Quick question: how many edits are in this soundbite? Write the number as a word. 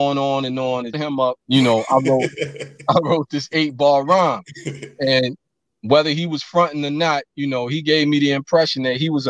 three